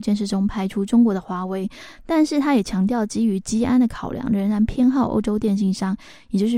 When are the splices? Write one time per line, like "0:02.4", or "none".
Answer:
none